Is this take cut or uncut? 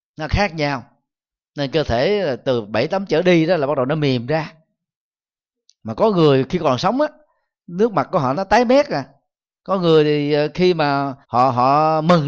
cut